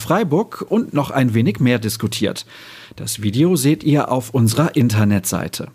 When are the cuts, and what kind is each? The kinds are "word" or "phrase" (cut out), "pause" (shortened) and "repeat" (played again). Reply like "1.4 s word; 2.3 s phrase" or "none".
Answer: none